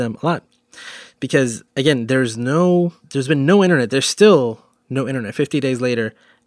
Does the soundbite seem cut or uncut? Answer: cut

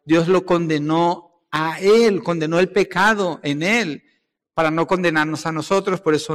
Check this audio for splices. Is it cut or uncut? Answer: uncut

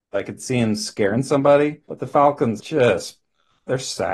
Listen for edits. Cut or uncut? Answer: cut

